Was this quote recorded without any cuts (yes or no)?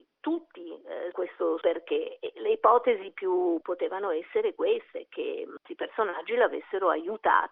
no